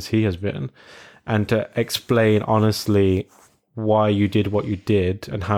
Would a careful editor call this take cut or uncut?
uncut